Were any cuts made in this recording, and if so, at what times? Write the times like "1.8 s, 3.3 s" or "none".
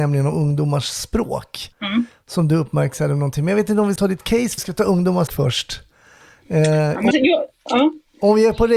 1.7 s, 4.0 s, 4.6 s, 5.3 s, 7.1 s